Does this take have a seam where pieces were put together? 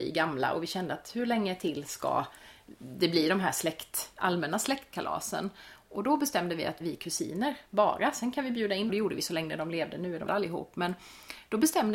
yes; 3 cuts; at 6.8 s, 8.9 s, 10.3 s

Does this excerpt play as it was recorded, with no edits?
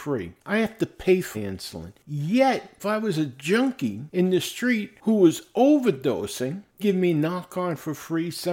no; 3 cuts; at 1.3 s, 2.8 s, 6.8 s

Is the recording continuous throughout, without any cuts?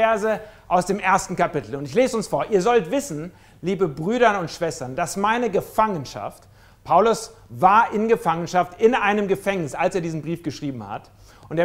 yes; 0 cuts

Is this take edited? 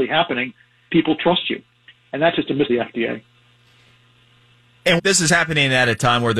yes; 2 cuts; at 2.7 s, 5.0 s

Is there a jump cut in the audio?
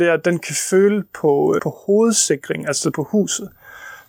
yes; 2 cuts; at 1.6 s, 2.9 s

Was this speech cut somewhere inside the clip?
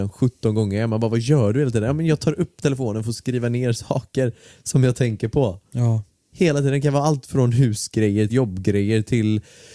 yes; 1 cut; at 8.3 s

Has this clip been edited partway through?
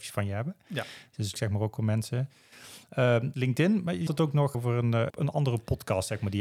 yes; 5 cuts; at 1.3 s, 3.3 s, 4.1 s, 4.5 s, 5.1 s

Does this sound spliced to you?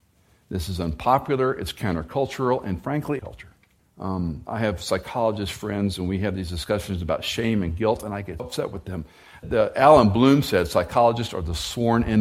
yes; 4 cuts; at 3.2 s, 3.8 s, 8.4 s, 9.4 s

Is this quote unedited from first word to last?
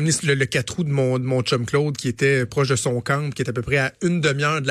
yes; 0 cuts

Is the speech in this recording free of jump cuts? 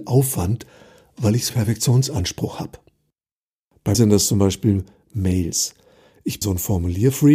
no; 3 cuts; at 1.5 s, 3.9 s, 6.4 s

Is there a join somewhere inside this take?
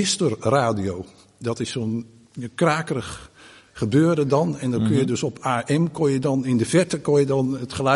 no; 0 cuts

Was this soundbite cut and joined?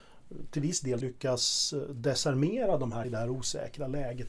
yes; 2 cuts; at 1.0 s, 3.0 s

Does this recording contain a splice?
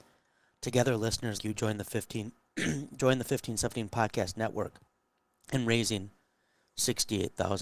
yes; 1 cut; at 1.4 s

